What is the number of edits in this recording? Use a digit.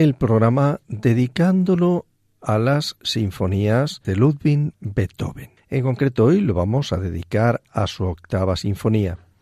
1